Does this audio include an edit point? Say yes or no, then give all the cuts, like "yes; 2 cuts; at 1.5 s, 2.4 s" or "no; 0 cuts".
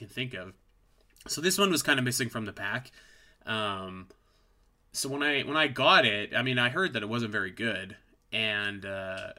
no; 0 cuts